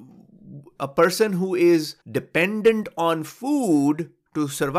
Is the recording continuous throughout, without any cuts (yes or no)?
no